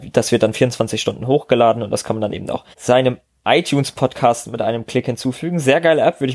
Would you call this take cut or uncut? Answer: cut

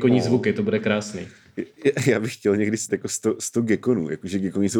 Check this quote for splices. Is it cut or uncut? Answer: cut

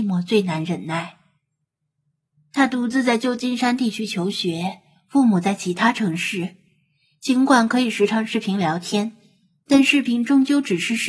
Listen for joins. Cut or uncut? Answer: uncut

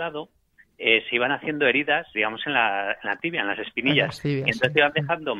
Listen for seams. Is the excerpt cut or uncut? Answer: cut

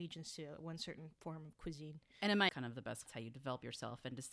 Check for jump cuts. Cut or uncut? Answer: cut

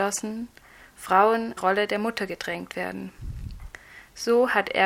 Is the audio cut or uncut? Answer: cut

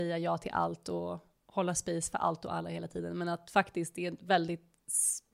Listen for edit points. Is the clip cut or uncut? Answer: uncut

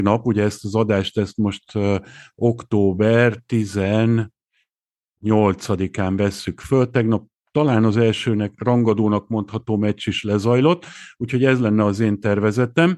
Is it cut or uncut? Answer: uncut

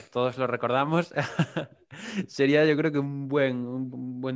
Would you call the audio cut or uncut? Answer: uncut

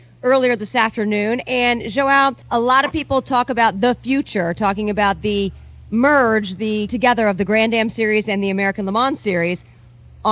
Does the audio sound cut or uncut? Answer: cut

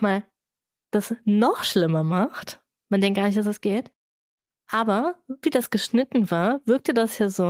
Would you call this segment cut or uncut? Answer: cut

